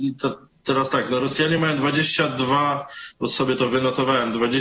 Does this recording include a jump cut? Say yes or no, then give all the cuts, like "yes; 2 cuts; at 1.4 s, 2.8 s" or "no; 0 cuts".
no; 0 cuts